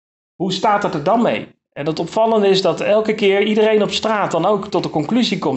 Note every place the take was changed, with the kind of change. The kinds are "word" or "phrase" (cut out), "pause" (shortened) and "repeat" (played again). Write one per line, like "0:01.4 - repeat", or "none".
none